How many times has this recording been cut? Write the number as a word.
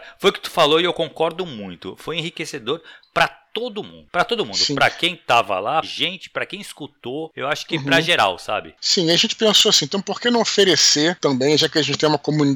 one